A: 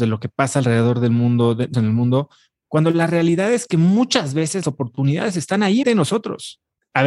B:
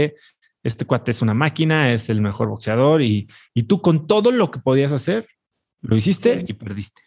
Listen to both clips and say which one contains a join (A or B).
A